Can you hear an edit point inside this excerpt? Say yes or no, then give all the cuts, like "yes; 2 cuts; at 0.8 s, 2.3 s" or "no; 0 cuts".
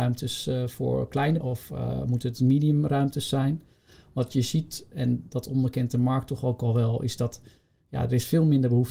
yes; 1 cut; at 1.4 s